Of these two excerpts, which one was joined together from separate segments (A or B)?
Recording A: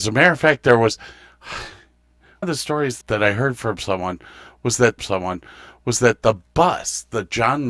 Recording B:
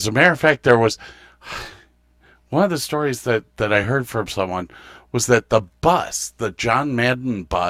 A